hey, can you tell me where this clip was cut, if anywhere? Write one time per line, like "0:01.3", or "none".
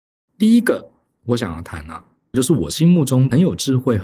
none